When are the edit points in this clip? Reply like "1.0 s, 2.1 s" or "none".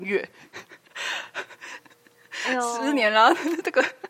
1.8 s